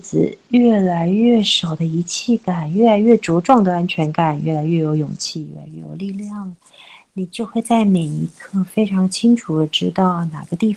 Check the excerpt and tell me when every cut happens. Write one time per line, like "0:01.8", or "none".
none